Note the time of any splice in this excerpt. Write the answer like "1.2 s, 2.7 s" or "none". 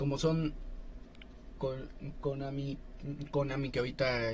1.5 s